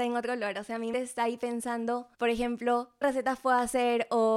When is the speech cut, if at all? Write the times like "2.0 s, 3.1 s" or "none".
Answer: 0.9 s, 2.1 s, 3.0 s